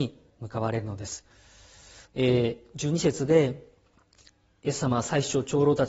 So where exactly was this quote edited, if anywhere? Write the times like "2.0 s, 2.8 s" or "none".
2.1 s